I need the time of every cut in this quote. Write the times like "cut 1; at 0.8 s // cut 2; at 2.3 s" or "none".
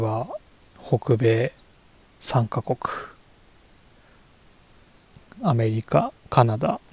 none